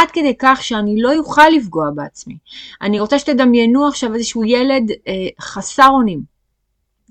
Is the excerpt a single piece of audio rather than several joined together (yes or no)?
yes